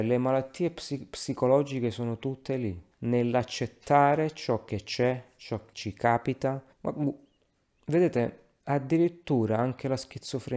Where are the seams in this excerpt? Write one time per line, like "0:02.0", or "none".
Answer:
0:02.9
0:05.7
0:06.7
0:08.6